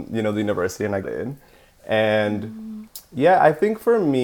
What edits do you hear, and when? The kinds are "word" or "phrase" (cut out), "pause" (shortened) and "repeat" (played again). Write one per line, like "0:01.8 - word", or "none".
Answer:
0:01.0 - word